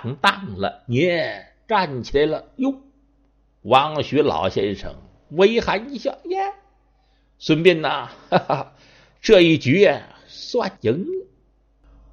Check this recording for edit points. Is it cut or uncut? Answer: cut